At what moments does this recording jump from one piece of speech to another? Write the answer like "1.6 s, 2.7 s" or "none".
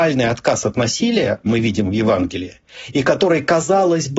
1.5 s